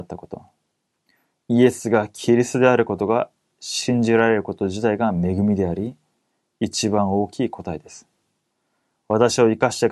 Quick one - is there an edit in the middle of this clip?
no; 0 cuts

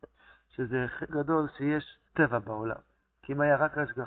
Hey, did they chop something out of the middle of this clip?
yes; 3 cuts; at 1.1 s, 2.0 s, 3.0 s

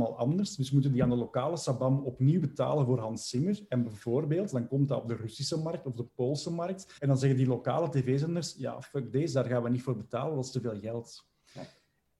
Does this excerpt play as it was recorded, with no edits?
no; 1 cut; at 7.0 s

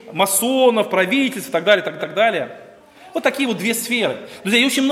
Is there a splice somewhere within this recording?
yes; 1 cut; at 2.0 s

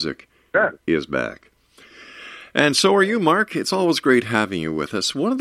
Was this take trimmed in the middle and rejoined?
no; 0 cuts

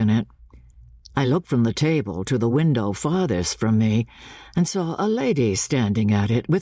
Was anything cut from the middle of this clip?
no; 0 cuts

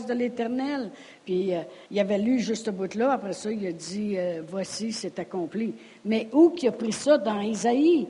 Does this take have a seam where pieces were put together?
yes; 1 cut; at 1.9 s

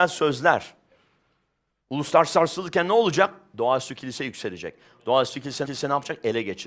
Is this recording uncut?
no; 1 cut; at 5.6 s

